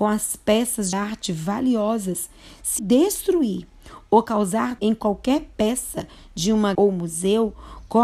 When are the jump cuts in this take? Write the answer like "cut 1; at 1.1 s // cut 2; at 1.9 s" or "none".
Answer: cut 1; at 0.9 s // cut 2; at 2.8 s // cut 3; at 4.8 s // cut 4; at 6.7 s